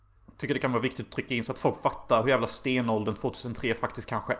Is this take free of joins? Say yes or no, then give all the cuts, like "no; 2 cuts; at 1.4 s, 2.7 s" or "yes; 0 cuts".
yes; 0 cuts